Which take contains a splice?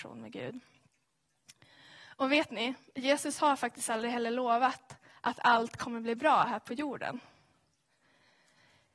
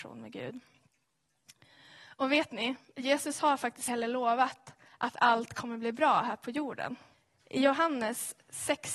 second; 2 cuts; at 3.9 s, 7.1 s

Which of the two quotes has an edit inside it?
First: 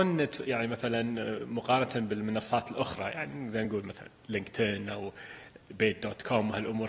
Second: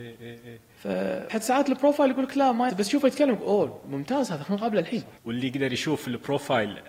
second; 3 cuts; at 1.3 s, 2.7 s, 5.2 s

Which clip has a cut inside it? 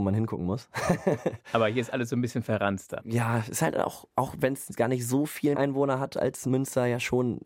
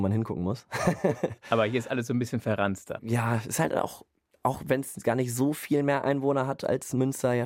first; 2 cuts; at 4.1 s, 5.5 s

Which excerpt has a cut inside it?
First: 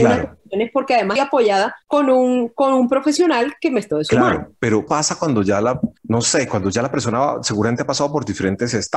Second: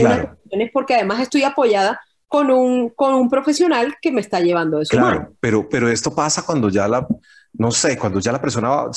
first; 5 cuts; at 1.2 s, 1.8 s, 3.9 s, 4.9 s, 6.0 s

